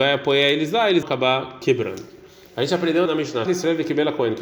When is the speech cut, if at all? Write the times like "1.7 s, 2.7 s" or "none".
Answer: 1.0 s, 3.1 s, 3.5 s